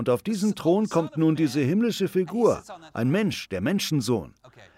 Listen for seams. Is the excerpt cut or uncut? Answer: uncut